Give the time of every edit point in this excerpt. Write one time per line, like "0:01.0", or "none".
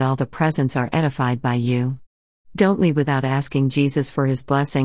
none